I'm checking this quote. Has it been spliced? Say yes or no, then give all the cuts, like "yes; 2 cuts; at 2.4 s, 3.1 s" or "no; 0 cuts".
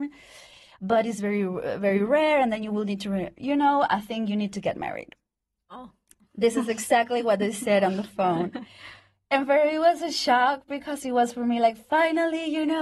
no; 0 cuts